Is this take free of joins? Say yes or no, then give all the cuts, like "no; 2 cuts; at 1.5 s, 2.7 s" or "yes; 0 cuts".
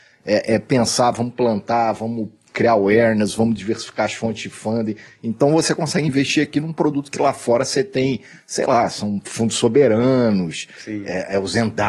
yes; 0 cuts